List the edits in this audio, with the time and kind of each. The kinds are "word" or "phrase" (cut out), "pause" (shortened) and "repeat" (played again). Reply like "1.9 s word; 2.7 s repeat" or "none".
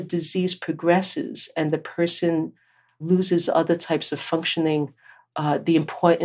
none